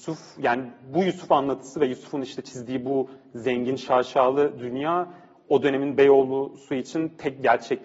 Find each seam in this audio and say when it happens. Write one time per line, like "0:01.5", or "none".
none